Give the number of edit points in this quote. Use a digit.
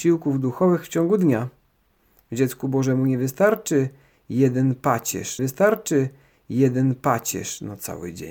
1